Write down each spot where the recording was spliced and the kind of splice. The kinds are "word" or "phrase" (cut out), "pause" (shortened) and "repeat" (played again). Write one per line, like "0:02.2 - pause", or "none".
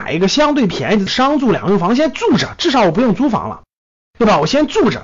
none